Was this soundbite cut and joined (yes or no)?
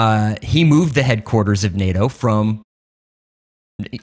no